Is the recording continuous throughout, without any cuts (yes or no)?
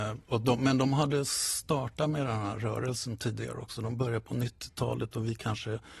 yes